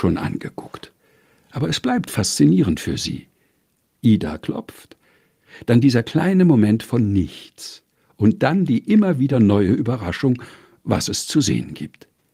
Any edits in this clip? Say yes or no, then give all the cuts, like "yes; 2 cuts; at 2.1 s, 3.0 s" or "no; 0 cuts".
no; 0 cuts